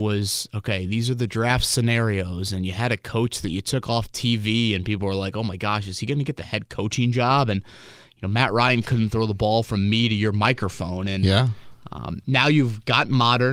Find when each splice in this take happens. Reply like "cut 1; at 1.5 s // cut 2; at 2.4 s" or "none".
none

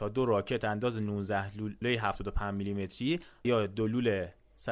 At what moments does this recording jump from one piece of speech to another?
cut 1; at 1.8 s // cut 2; at 3.4 s

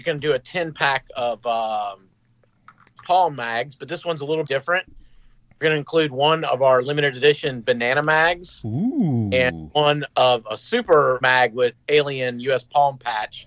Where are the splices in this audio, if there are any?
cut 1; at 3.0 s // cut 2; at 4.5 s // cut 3; at 11.2 s

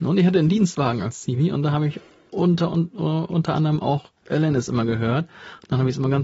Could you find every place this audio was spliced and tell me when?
none

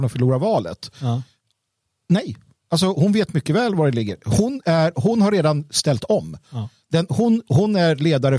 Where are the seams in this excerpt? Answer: none

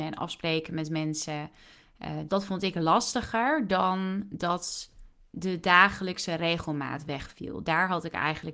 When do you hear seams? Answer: cut 1; at 2.3 s

